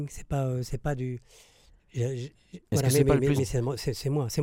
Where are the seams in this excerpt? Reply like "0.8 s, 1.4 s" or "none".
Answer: 2.6 s, 3.4 s

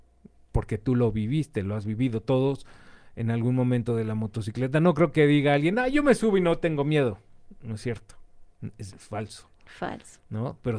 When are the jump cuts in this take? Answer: none

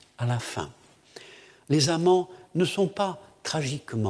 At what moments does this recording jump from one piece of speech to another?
none

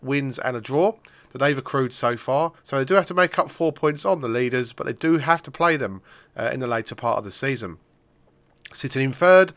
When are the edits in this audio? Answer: 2.6 s

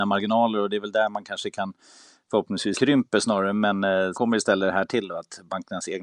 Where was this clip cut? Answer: 2.7 s, 4.1 s

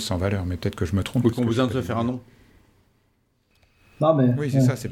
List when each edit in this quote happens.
none

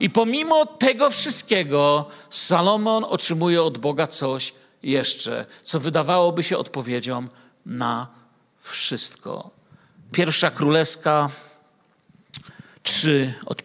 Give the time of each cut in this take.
none

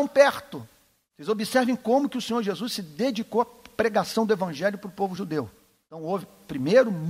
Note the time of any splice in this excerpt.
none

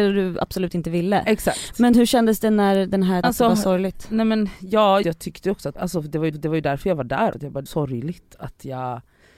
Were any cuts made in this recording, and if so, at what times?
3.2 s, 5.0 s, 5.7 s, 6.3 s, 7.3 s, 7.7 s

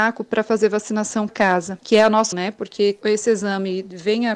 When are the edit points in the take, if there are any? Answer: 1.3 s, 2.3 s, 3.0 s

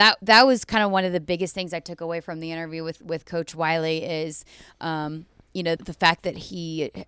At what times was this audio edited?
5.8 s

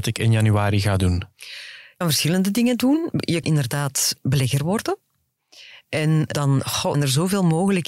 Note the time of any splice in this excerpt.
2.0 s, 3.4 s, 6.3 s, 6.9 s

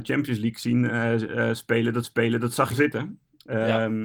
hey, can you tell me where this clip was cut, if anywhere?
2.0 s, 2.7 s

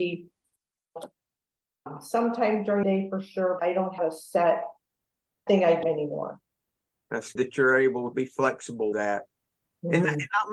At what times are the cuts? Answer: 2.8 s, 3.6 s, 4.0 s, 5.5 s, 5.8 s, 7.4 s, 8.1 s, 8.9 s

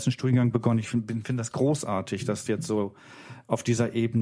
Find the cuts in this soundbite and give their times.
1.5 s, 2.5 s

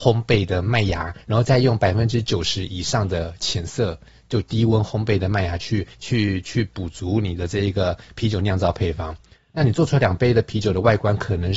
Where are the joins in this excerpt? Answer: 1.2 s, 5.9 s

